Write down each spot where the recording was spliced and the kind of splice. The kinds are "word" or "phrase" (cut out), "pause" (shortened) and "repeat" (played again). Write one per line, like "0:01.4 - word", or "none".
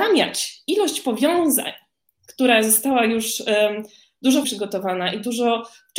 0:04.4 - word